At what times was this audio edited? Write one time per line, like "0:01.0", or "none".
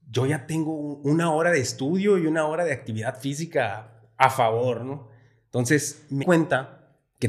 0:06.2